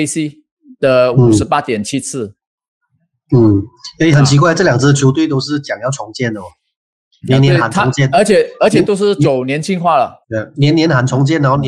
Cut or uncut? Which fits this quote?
cut